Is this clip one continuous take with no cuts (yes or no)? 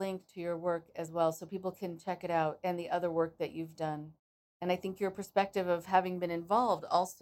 yes